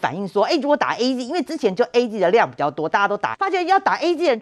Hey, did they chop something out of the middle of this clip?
yes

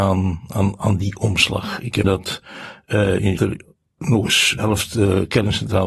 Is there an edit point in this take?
yes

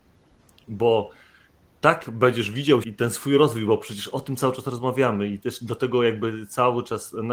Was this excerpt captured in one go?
no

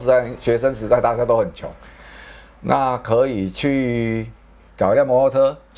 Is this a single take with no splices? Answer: yes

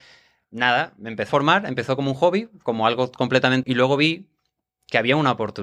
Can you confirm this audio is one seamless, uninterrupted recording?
no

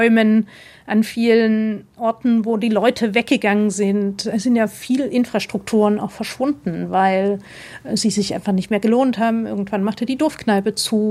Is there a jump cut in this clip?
no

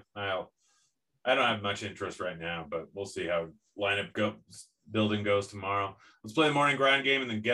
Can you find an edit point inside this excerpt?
no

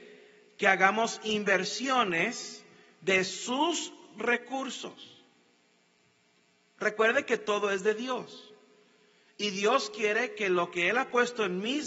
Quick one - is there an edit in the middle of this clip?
no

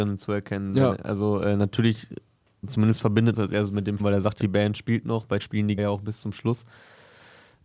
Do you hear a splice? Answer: yes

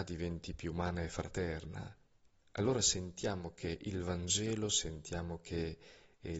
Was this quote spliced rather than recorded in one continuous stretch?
yes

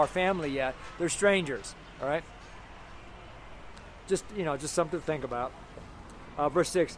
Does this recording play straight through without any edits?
yes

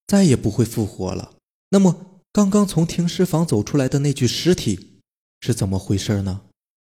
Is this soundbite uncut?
yes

